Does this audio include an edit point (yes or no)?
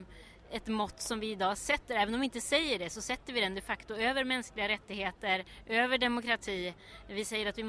no